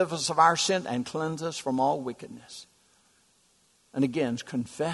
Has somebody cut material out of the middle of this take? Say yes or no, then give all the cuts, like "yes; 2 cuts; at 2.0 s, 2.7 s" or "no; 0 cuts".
no; 0 cuts